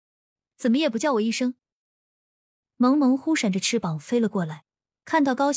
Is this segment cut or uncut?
uncut